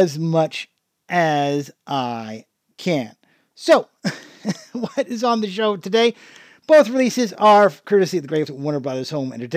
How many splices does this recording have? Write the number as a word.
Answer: one